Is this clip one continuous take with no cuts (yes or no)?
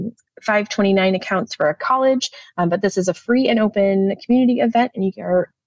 yes